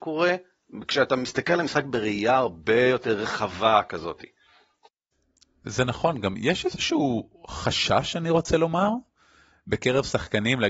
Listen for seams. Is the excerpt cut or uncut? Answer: uncut